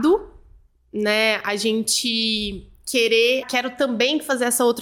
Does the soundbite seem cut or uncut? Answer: cut